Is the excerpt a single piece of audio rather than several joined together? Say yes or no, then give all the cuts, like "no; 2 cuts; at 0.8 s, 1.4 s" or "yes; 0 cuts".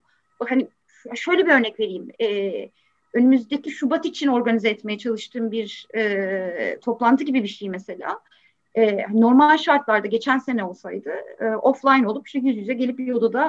yes; 0 cuts